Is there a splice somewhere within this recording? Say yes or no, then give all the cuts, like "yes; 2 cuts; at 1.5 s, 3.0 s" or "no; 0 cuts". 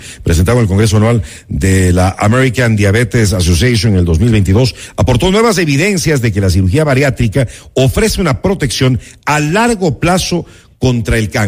no; 0 cuts